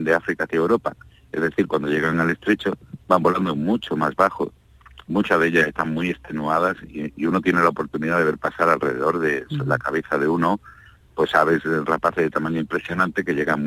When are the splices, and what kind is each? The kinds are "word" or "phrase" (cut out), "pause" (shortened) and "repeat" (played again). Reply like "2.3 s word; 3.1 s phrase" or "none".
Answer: none